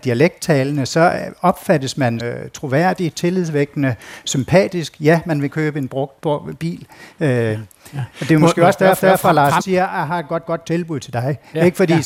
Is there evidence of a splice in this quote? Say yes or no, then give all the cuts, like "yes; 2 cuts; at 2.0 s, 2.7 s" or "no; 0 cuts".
yes; 6 cuts; at 2.2 s, 5.5 s, 8.1 s, 9.0 s, 9.6 s, 10.5 s